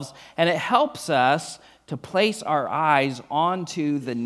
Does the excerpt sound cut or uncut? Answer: uncut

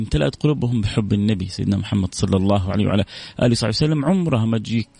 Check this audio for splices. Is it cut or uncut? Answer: uncut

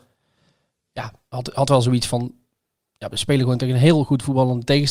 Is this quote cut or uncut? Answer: uncut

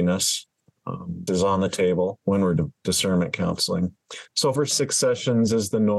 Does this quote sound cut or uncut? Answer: cut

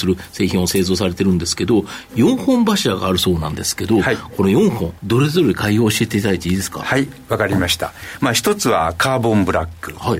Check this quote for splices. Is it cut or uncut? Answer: cut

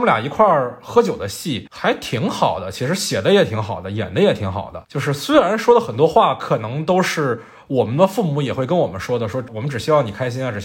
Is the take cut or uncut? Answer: uncut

